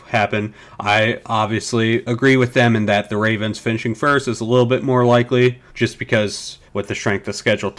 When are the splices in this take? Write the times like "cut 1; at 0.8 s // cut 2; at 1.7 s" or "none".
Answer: cut 1; at 5.7 s // cut 2; at 6.7 s